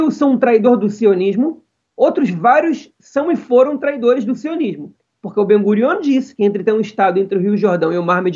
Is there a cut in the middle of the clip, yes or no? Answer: no